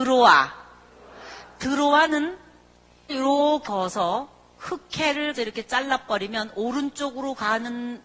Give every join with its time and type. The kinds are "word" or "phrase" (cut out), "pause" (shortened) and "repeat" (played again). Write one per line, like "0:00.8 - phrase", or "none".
0:03.1 - word
0:03.6 - word
0:05.3 - word